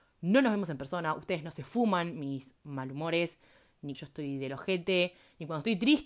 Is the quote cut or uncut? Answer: cut